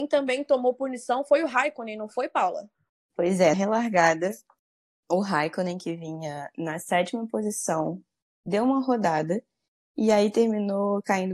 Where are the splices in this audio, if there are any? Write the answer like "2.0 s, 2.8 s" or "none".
3.5 s